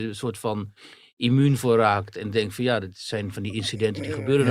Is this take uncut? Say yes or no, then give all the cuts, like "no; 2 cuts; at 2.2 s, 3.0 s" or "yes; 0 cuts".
yes; 0 cuts